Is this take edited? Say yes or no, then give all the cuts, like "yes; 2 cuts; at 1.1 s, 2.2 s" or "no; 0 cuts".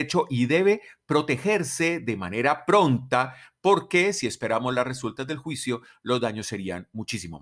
no; 0 cuts